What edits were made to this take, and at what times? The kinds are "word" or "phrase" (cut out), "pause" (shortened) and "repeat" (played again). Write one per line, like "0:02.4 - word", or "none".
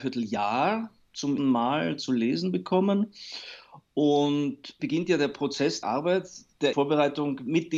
0:01.4 - word
0:04.8 - word
0:05.8 - word
0:06.7 - word